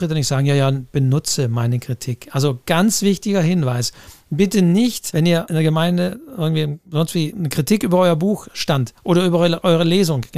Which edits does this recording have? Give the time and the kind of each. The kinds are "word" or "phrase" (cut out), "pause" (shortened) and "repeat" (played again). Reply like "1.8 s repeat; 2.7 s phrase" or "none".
6.8 s pause